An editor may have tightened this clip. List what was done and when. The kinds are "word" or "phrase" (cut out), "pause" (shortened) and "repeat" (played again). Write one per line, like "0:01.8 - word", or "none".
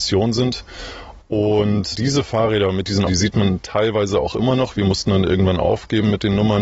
0:01.9 - word
0:03.1 - word